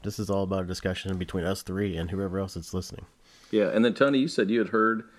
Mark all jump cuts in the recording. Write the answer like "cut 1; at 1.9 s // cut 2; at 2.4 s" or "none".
none

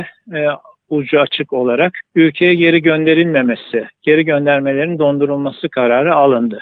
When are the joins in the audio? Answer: cut 1; at 2.1 s

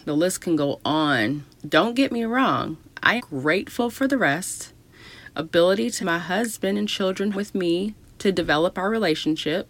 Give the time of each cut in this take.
cut 1; at 1.5 s // cut 2; at 3.2 s // cut 3; at 6.0 s // cut 4; at 7.3 s

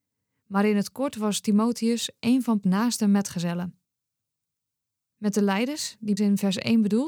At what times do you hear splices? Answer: cut 1; at 2.6 s // cut 2; at 6.2 s

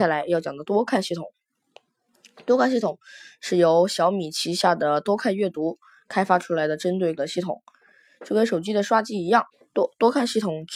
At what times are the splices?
cut 1; at 7.2 s // cut 2; at 9.5 s

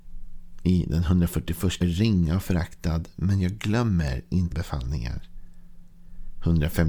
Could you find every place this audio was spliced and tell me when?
cut 1; at 1.8 s // cut 2; at 4.5 s

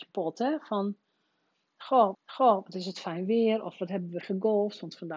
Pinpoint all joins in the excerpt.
cut 1; at 2.1 s // cut 2; at 4.2 s

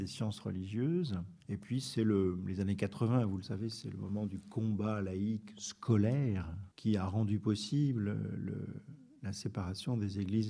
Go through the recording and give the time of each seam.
cut 1; at 1.4 s // cut 2; at 6.7 s

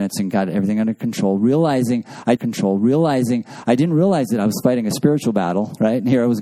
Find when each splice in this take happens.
cut 1; at 2.4 s

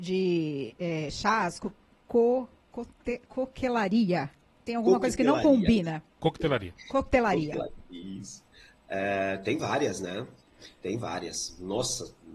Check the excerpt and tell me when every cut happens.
none

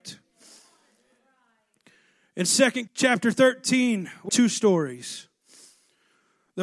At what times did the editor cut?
cut 1; at 2.9 s // cut 2; at 4.3 s

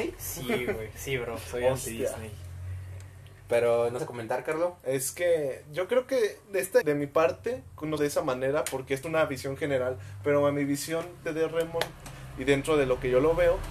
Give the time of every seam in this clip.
cut 1; at 3.4 s // cut 2; at 4.0 s // cut 3; at 6.8 s // cut 4; at 8.0 s // cut 5; at 9.0 s // cut 6; at 11.2 s

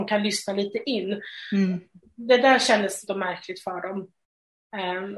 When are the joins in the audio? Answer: cut 1; at 3.1 s

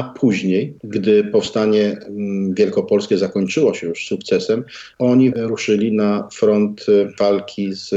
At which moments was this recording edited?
cut 1; at 5.3 s

